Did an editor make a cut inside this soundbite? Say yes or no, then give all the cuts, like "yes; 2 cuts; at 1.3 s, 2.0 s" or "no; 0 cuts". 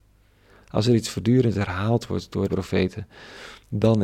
yes; 1 cut; at 2.5 s